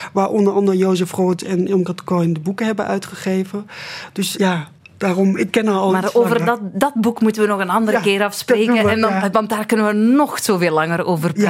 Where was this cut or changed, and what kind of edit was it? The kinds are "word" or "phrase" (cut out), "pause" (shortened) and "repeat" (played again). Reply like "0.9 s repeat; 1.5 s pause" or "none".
4.3 s word